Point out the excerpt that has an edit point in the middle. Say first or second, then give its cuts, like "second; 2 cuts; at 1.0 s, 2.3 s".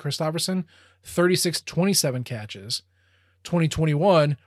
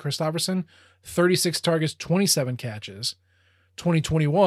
first; 1 cut; at 1.6 s